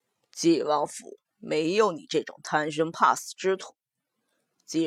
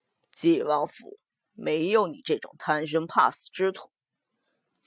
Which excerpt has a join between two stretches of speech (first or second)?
first